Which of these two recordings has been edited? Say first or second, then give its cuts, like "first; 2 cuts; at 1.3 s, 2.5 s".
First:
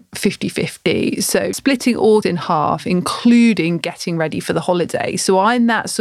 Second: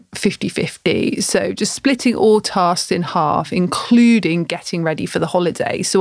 first; 2 cuts; at 1.5 s, 2.2 s